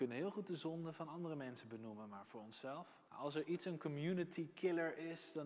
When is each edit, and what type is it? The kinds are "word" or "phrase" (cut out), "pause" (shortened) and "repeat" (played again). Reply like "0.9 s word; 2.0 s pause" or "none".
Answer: 3.1 s pause